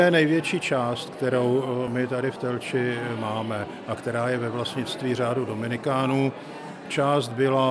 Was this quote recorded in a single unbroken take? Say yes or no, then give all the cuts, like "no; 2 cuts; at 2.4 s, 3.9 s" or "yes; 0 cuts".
yes; 0 cuts